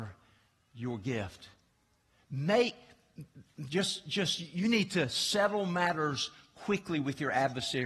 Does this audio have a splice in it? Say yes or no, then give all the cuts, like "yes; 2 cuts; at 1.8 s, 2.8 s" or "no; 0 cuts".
no; 0 cuts